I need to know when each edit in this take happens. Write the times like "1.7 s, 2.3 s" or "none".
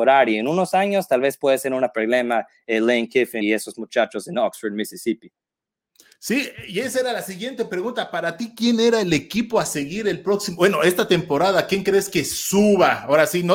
3.4 s